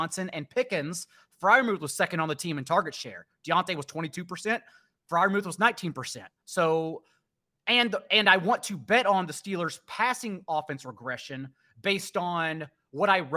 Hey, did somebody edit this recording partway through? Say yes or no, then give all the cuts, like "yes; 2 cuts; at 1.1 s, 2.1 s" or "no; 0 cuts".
no; 0 cuts